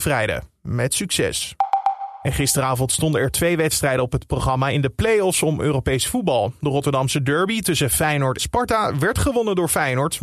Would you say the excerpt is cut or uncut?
cut